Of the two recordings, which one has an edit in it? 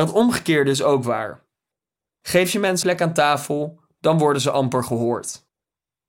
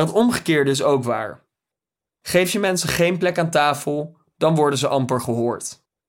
first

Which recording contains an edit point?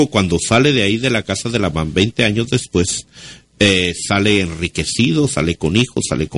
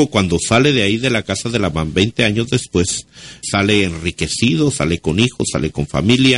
second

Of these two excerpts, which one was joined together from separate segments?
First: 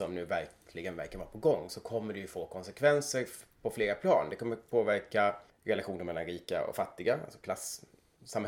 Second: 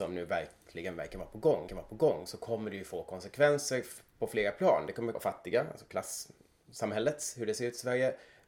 second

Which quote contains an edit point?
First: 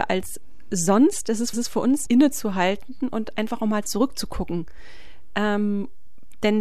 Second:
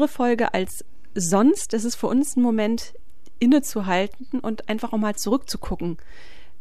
first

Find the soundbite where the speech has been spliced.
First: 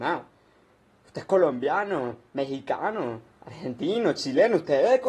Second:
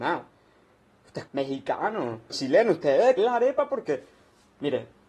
second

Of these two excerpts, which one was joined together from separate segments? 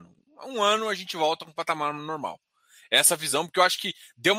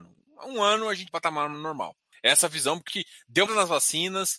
second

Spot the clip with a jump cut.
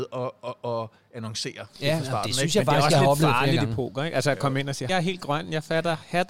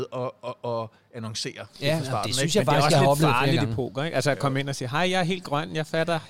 first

